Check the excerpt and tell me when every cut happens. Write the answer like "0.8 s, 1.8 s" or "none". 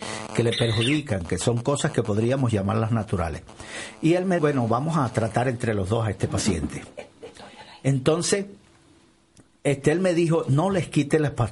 4.4 s